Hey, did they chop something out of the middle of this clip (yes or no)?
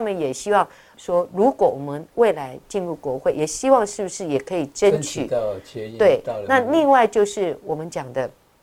no